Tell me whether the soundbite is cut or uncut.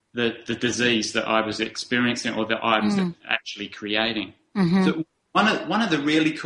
uncut